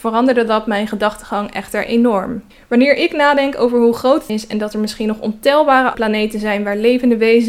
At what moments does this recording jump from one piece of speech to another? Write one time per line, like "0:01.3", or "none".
0:02.5
0:04.3
0:05.9